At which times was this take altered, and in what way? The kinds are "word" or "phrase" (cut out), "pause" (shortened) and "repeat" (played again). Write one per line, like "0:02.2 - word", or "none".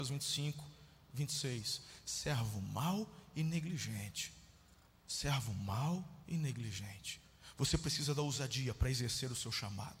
0:04.9 - pause